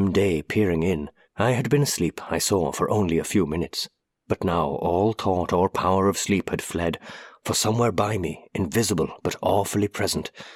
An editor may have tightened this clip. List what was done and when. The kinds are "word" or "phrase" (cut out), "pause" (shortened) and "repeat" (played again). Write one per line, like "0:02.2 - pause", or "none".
0:01.2 - pause
0:04.1 - pause